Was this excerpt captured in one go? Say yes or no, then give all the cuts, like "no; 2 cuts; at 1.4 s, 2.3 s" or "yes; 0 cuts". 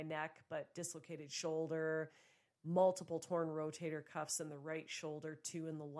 yes; 0 cuts